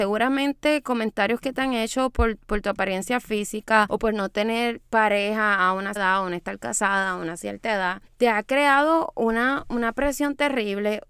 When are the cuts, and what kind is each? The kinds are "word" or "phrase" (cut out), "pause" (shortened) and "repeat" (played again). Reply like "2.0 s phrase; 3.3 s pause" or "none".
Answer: 6.0 s word